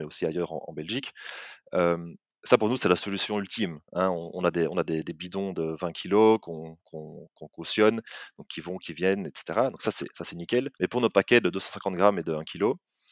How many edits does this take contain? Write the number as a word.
two